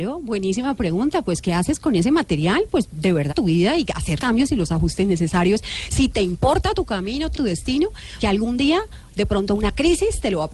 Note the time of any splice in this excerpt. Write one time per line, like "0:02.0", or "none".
0:03.3
0:04.2
0:07.3
0:08.2